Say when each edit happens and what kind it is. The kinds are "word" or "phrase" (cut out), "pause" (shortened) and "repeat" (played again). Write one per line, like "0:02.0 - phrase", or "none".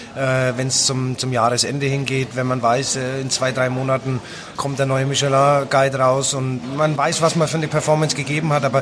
none